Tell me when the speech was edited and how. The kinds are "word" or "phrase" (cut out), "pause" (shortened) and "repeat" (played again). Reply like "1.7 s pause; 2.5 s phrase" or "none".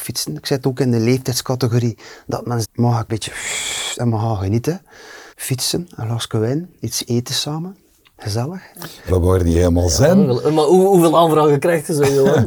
2.6 s word; 3.1 s word; 5.3 s pause; 6.8 s pause; 9.1 s phrase